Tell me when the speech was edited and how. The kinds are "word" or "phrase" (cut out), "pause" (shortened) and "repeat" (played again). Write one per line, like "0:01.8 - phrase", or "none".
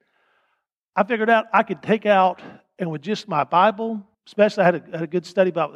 0:04.1 - pause

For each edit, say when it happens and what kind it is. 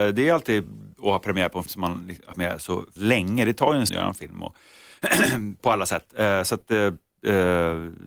0:01.0 - word
0:01.7 - word
0:02.3 - word
0:03.0 - word
0:03.9 - word
0:05.6 - word

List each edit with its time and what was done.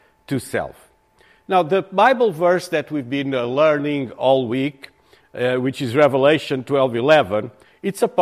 none

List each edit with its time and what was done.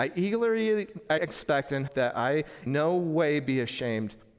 0:01.2 - word
0:01.9 - word
0:02.7 - word

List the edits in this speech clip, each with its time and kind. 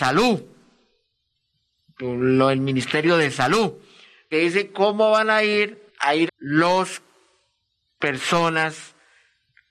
0:04.3 - word
0:05.9 - pause
0:06.3 - phrase

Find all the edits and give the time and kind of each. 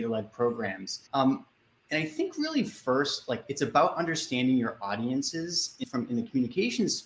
0:01.1 - pause
0:05.8 - phrase

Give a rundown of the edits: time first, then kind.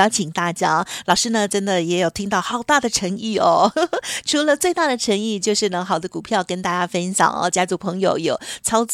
none

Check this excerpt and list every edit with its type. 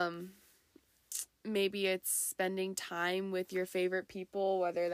none

